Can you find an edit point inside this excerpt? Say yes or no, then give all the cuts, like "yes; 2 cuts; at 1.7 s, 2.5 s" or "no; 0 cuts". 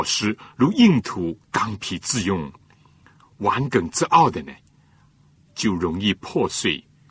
yes; 1 cut; at 1.4 s